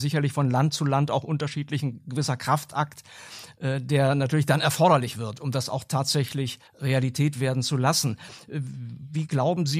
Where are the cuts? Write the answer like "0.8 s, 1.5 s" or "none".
6.7 s